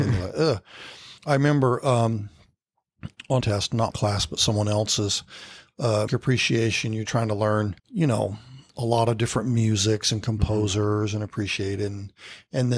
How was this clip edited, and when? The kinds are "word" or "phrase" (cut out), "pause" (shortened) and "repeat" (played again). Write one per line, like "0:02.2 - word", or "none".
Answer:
0:01.2 - pause
0:03.4 - phrase
0:03.9 - word
0:06.1 - word
0:07.1 - word
0:07.8 - pause
0:08.7 - pause